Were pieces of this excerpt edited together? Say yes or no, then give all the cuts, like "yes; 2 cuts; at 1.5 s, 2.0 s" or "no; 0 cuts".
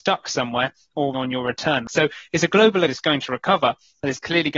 yes; 2 cuts; at 1.1 s, 2.9 s